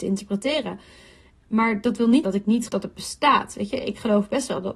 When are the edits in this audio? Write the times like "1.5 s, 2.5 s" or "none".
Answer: 2.2 s, 2.7 s